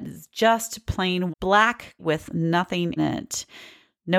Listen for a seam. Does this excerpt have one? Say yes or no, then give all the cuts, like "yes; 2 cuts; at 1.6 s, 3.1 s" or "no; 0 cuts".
yes; 3 cuts; at 1.3 s, 2.0 s, 3.0 s